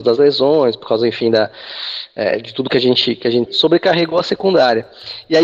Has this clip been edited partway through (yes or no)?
yes